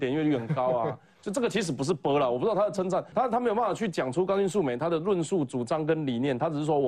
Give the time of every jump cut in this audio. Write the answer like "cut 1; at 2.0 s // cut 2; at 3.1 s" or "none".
cut 1; at 3.1 s